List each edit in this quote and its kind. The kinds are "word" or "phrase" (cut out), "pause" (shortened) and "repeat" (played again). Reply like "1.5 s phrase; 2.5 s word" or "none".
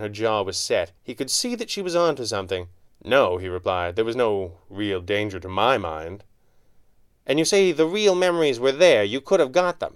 1.0 s pause; 2.9 s pause